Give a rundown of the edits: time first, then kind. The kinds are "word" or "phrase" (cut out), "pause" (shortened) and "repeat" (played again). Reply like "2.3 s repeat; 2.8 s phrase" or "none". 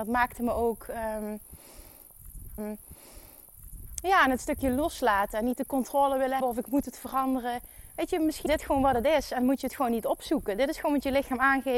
2.6 s repeat; 6.4 s word; 8.5 s word